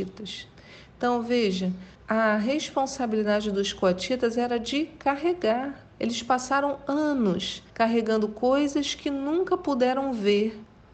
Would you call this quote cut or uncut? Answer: cut